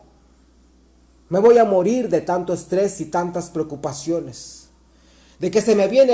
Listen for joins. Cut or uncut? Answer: uncut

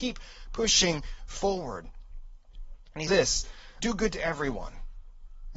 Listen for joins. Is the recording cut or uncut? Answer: cut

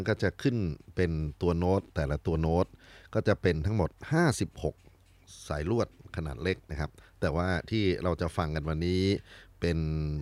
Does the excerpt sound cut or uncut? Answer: uncut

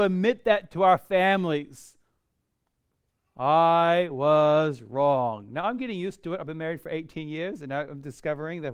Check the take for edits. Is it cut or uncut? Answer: uncut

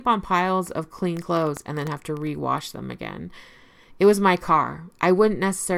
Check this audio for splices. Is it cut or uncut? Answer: uncut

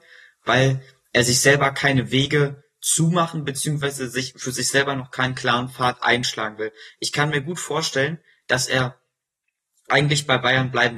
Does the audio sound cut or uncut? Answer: uncut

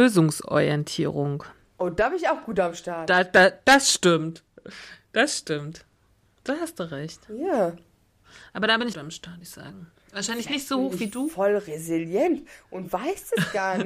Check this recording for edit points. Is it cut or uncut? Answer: cut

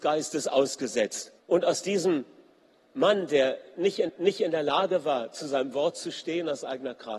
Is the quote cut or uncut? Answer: cut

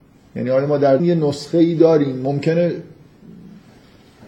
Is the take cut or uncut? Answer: cut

